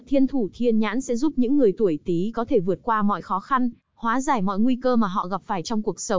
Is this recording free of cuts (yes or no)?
yes